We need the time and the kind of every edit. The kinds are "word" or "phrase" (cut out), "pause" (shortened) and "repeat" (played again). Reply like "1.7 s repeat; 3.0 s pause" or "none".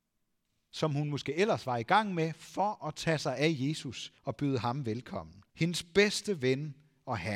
4.2 s pause; 5.5 s pause